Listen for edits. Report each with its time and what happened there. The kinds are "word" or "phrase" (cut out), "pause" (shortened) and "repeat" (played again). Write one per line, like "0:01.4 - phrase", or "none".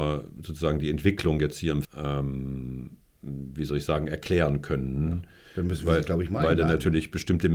0:01.8 - word

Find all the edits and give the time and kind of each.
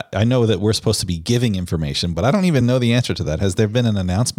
none

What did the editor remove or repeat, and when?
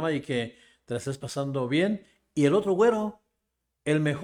none

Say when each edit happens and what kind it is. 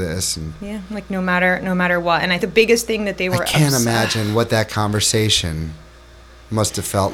0:02.4 - word

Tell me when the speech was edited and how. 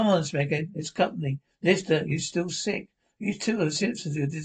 none

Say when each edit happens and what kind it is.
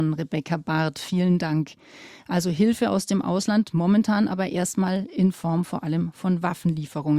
none

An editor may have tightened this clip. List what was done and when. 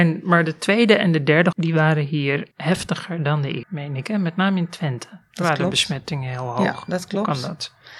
0:01.5 - word
0:02.5 - pause
0:03.6 - word

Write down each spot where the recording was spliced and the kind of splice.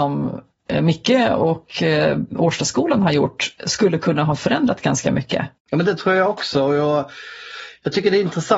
0:05.6 - pause

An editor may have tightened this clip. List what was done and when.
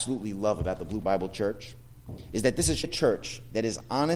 0:01.0 - word
0:02.8 - word

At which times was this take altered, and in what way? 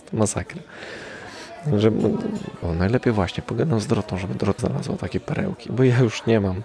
0:02.6 - word
0:04.6 - word

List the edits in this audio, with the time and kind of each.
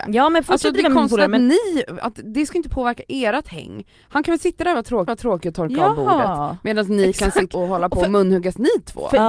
0:05.1 - repeat
0:07.5 - word

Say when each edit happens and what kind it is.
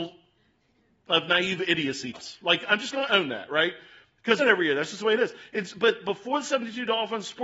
0:02.1 - word
0:04.4 - phrase

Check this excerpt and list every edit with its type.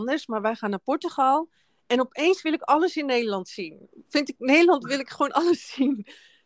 none

